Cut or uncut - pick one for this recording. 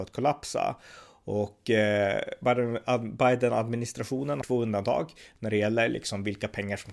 cut